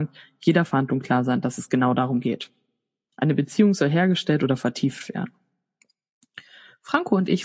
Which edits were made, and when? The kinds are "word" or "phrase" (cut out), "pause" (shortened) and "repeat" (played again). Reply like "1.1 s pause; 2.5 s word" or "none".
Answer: none